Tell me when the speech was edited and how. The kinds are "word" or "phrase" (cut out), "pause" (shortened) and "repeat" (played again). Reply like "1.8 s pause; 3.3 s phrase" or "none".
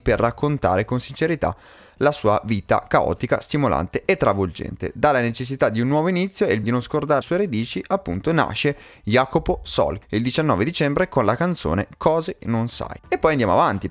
6.6 s word; 7.2 s word; 10.0 s word; 12.4 s word

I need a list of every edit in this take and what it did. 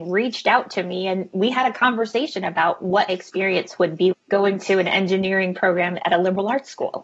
3.1 s word; 4.1 s word

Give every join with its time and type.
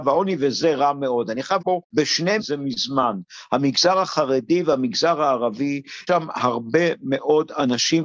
1.6 s word; 2.4 s phrase; 6.1 s word

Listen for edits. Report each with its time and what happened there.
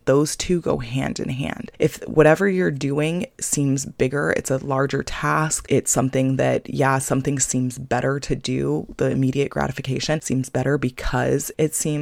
none

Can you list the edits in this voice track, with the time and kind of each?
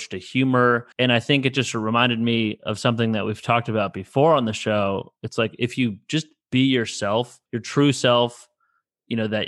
0.9 s pause; 7.5 s pause

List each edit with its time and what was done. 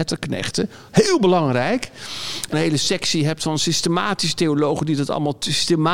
2.5 s phrase

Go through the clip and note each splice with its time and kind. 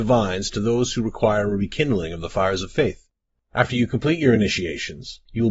none

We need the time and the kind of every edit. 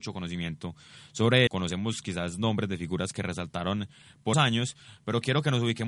1.5 s word; 4.3 s word

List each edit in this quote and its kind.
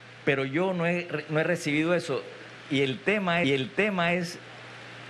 3.4 s repeat

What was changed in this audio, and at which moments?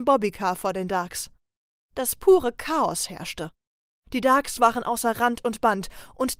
none

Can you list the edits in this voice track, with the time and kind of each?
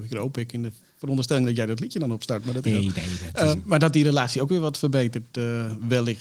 2.6 s word; 3.5 s word

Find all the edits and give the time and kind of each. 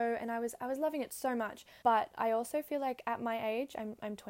1.8 s pause

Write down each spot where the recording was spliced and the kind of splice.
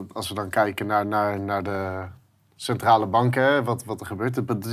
none

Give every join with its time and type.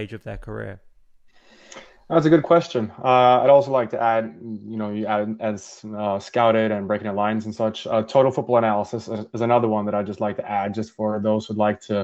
none

